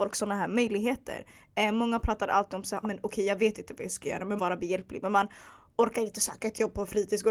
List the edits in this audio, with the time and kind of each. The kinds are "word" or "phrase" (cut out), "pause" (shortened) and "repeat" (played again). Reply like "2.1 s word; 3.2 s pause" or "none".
2.8 s word; 4.4 s phrase